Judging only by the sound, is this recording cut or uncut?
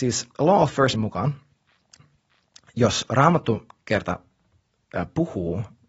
cut